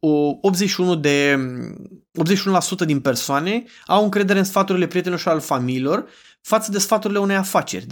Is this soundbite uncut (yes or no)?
yes